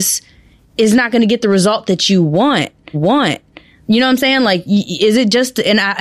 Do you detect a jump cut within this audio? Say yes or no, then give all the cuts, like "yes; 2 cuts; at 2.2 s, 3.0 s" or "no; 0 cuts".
yes; 1 cut; at 2.9 s